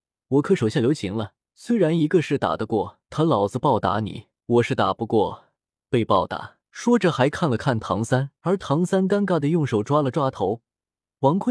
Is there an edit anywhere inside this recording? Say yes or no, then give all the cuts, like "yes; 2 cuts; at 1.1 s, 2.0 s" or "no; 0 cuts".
yes; 5 cuts; at 1.5 s, 3.0 s, 4.4 s, 6.7 s, 8.4 s